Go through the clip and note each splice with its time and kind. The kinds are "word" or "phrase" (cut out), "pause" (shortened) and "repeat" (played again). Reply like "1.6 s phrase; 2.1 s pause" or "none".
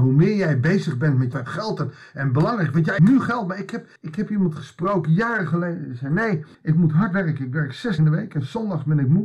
1.3 s word; 3.0 s phrase; 4.0 s pause; 6.5 s pause; 8.0 s word